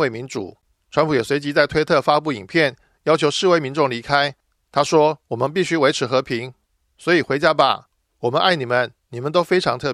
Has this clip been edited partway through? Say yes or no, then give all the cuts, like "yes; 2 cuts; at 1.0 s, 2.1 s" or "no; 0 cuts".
no; 0 cuts